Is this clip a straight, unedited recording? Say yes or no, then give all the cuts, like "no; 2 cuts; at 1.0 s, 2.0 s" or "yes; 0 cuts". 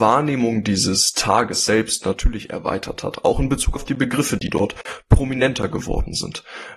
yes; 0 cuts